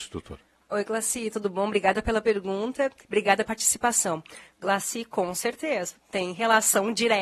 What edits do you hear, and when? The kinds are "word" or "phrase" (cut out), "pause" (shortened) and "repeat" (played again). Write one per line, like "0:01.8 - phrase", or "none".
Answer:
0:03.5 - word

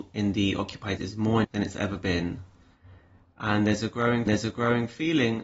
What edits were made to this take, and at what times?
0:01.0 - word
0:01.4 - word
0:04.3 - repeat

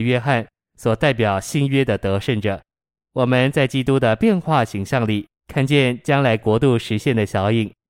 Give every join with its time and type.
0:02.8 - pause
0:05.4 - pause

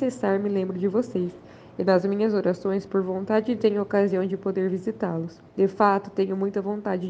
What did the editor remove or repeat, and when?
0:02.9 - phrase
0:03.6 - phrase
0:05.5 - pause

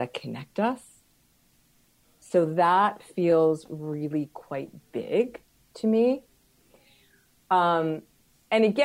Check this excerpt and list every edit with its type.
none

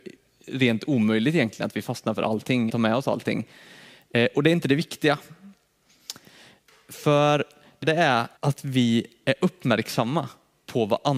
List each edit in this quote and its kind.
0:02.7 - word
0:07.8 - word
0:08.4 - pause

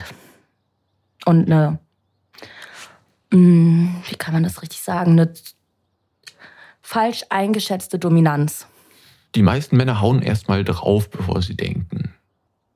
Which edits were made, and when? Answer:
none

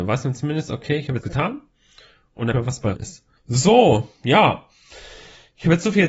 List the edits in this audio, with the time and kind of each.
0:01.2 - word
0:02.5 - phrase
0:02.9 - word
0:03.4 - pause

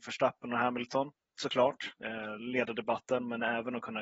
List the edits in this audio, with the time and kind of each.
none

